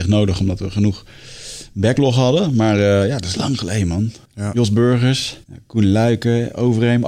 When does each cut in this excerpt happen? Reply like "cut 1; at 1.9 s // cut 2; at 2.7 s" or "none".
cut 1; at 4.2 s // cut 2; at 5.4 s